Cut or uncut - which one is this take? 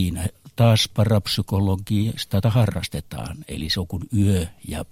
cut